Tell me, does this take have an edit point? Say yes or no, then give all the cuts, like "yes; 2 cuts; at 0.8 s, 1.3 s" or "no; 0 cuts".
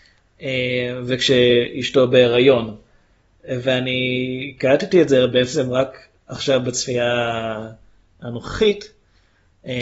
no; 0 cuts